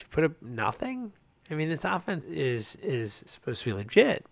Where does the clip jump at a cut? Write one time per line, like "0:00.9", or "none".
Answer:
0:02.2
0:03.3